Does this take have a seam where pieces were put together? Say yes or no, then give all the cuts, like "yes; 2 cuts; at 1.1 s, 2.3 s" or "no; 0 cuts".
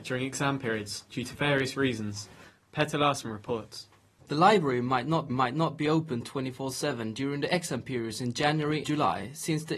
yes; 2 cuts; at 5.3 s, 8.8 s